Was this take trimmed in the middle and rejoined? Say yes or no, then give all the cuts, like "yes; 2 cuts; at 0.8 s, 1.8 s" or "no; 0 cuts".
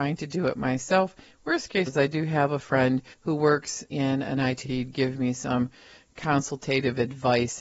yes; 4 cuts; at 1.9 s, 3.1 s, 3.9 s, 4.6 s